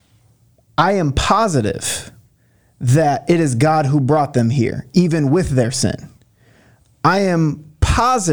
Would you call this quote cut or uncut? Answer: uncut